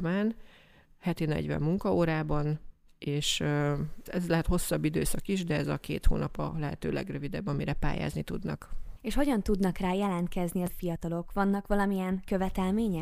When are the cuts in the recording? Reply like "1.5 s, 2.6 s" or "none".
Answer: 4.1 s, 10.7 s